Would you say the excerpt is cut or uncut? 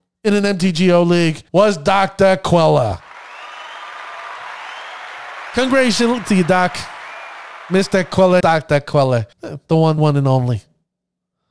cut